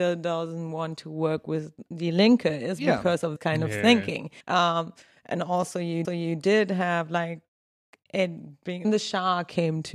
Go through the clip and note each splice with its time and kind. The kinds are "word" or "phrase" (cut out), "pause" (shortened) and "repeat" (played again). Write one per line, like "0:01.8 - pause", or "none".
0:03.4 - word
0:04.4 - pause
0:06.0 - repeat
0:08.8 - phrase